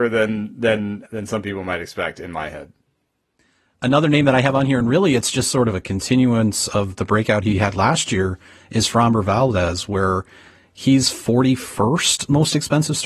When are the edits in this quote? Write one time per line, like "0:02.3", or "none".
none